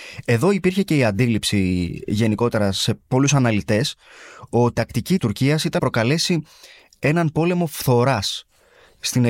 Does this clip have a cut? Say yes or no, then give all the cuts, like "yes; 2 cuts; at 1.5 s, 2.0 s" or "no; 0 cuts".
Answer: yes; 3 cuts; at 4.7 s, 5.2 s, 5.8 s